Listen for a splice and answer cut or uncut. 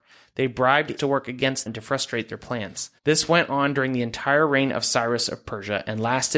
cut